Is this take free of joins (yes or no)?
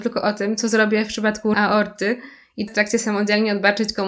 no